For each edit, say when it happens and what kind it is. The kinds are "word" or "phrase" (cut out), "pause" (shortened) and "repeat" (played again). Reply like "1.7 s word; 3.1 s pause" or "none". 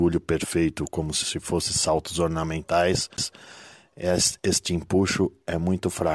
none